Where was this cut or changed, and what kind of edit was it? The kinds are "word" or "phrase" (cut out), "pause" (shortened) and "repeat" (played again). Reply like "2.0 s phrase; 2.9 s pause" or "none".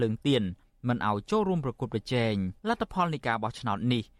2.6 s pause